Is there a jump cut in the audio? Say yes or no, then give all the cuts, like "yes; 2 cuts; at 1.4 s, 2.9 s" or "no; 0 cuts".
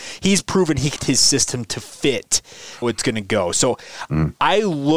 yes; 2 cuts; at 1.0 s, 2.8 s